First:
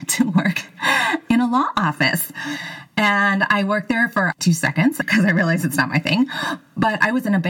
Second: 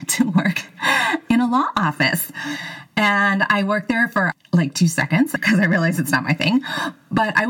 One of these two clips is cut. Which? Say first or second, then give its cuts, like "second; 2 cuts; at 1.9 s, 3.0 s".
first; 1 cut; at 4.4 s